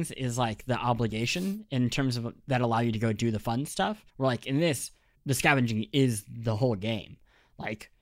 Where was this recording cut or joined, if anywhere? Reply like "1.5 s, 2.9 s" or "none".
2.4 s, 4.1 s, 5.1 s